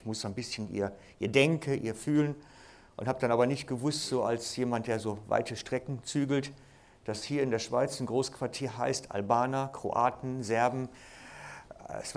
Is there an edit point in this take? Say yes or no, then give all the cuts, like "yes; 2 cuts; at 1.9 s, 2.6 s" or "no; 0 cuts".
no; 0 cuts